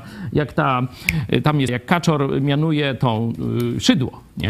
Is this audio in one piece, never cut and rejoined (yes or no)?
no